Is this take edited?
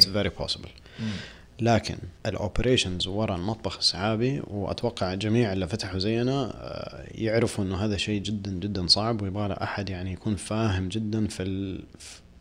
no; 0 cuts

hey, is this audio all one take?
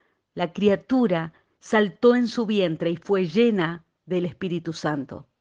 yes; 0 cuts

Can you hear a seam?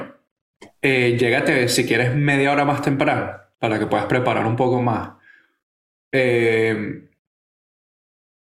no; 0 cuts

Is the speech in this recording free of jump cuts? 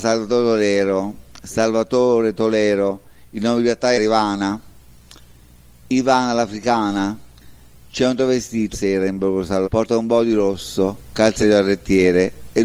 no; 4 cuts; at 4.0 s, 8.7 s, 9.6 s, 11.4 s

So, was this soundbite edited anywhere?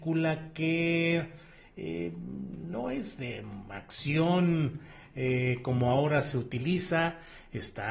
no; 0 cuts

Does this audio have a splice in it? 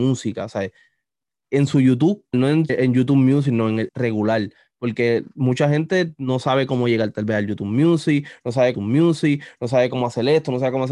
yes; 4 cuts; at 2.3 s, 2.7 s, 3.9 s, 8.7 s

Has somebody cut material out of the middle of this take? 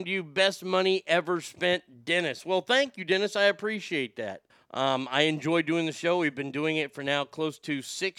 yes; 1 cut; at 4.5 s

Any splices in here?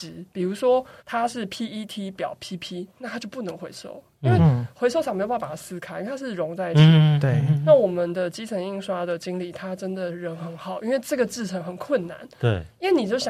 yes; 1 cut; at 1.0 s

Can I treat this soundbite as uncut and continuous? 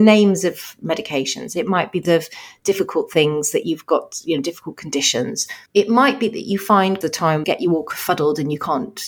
no; 4 cuts; at 2.0 s, 5.7 s, 7.0 s, 7.4 s

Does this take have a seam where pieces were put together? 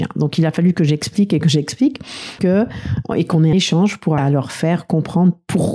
yes; 3 cuts; at 2.4 s, 3.5 s, 4.2 s

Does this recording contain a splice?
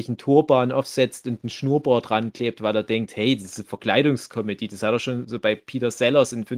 no; 0 cuts

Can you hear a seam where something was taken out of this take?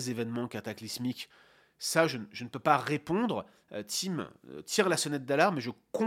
no; 0 cuts

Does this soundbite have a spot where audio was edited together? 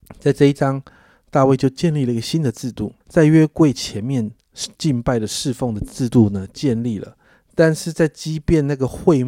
yes; 2 cuts; at 3.0 s, 7.2 s

